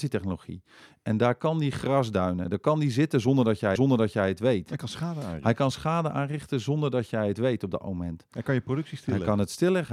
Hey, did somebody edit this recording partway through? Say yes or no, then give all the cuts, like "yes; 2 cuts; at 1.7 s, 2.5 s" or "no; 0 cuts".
yes; 1 cut; at 3.8 s